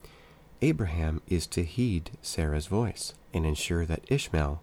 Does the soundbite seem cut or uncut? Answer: cut